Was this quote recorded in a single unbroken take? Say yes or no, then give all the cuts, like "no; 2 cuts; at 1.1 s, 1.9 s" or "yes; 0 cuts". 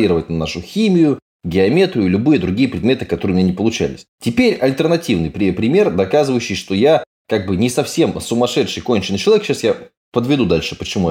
yes; 0 cuts